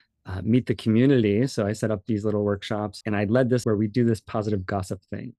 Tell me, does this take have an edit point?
yes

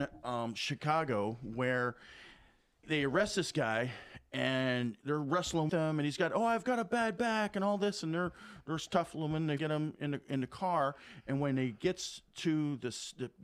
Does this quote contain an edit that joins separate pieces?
yes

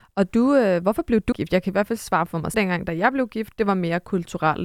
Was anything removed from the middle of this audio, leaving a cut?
yes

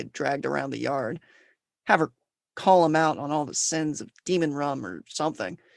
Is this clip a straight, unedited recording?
yes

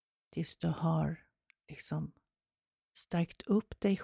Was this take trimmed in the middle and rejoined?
no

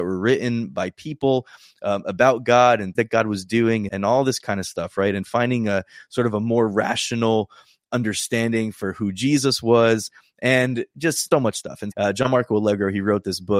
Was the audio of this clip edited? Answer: yes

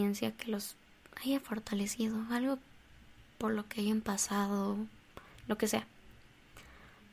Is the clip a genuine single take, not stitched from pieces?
yes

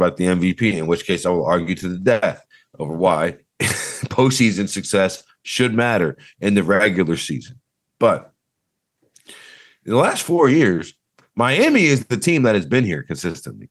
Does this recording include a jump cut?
no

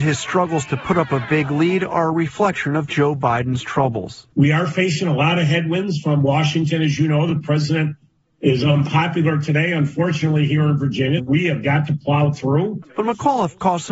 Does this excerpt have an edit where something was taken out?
yes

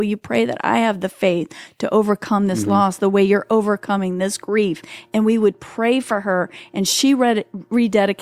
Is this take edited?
no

